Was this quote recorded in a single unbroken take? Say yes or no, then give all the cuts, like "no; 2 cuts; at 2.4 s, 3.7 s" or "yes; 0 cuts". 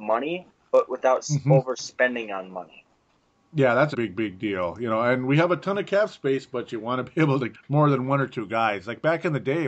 no; 2 cuts; at 3.9 s, 7.5 s